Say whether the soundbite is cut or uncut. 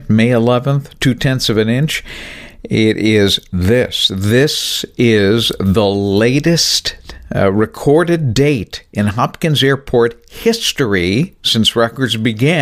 uncut